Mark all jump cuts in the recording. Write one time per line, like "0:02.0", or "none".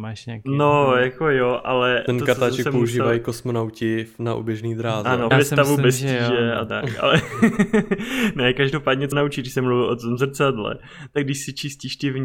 0:05.3
0:09.1